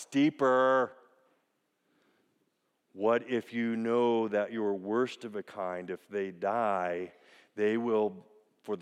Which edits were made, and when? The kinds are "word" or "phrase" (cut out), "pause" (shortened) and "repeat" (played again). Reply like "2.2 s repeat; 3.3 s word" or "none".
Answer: none

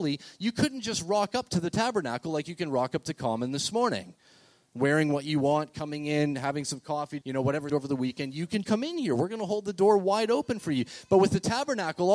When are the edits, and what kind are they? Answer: 7.2 s word; 7.7 s word; 8.6 s word

